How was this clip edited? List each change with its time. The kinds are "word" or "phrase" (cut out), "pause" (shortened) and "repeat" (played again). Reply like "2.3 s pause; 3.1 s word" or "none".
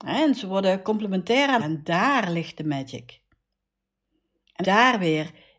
1.6 s word; 4.6 s word